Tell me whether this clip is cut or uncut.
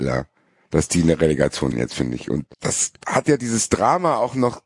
cut